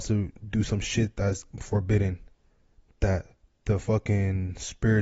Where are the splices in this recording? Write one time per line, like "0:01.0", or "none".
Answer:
none

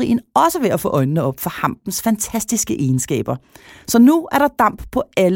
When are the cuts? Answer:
none

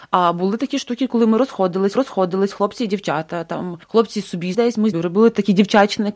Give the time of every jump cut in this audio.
0:02.0
0:03.8
0:04.5
0:04.9

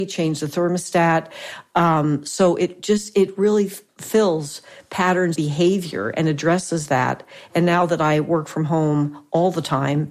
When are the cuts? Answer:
0:03.9
0:05.4

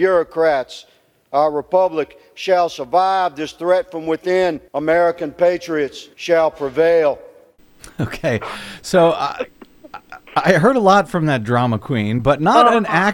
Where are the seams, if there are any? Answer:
0:04.7
0:06.1

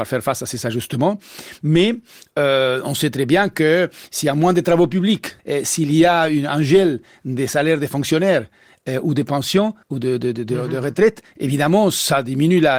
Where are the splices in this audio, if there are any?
0:05.4
0:09.8

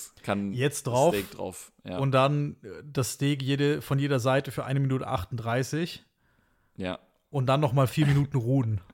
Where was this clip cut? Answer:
none

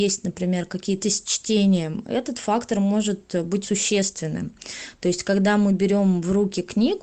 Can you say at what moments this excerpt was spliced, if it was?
0:01.0
0:03.6

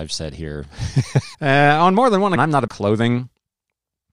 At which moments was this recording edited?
0:01.3
0:02.4
0:02.7

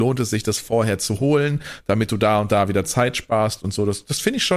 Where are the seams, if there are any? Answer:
none

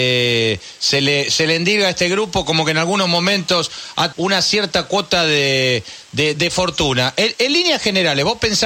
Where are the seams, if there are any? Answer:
0:04.1
0:06.3

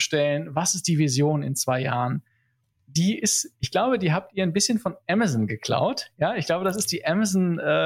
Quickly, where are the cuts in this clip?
none

